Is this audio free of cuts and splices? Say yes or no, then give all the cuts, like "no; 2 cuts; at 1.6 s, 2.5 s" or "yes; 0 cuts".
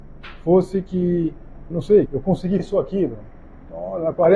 no; 3 cuts; at 1.7 s, 2.1 s, 2.6 s